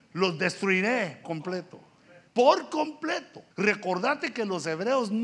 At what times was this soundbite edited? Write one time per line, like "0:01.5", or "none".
0:01.2
0:02.3
0:03.5